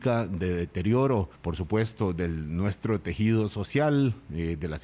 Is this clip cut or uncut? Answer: cut